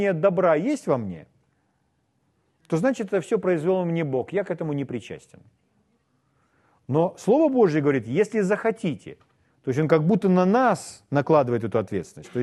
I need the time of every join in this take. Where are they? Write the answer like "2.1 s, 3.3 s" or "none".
9.5 s